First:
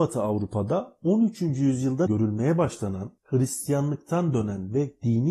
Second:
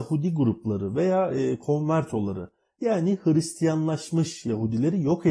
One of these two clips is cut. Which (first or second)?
first